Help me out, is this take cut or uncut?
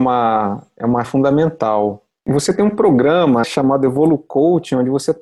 cut